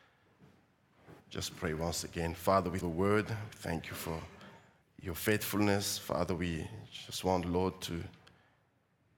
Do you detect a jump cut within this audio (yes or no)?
yes